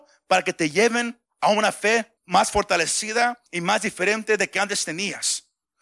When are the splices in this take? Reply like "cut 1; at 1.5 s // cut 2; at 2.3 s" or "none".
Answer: cut 1; at 1.3 s // cut 2; at 2.2 s // cut 3; at 3.5 s

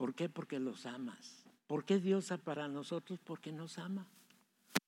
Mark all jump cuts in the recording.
cut 1; at 1.6 s // cut 2; at 2.4 s

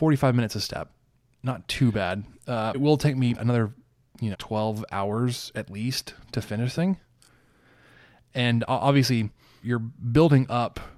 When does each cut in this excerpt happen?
cut 1; at 2.7 s // cut 2; at 3.4 s // cut 3; at 4.3 s // cut 4; at 6.7 s // cut 5; at 9.6 s

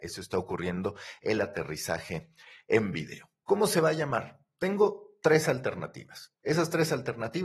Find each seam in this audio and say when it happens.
cut 1; at 3.4 s

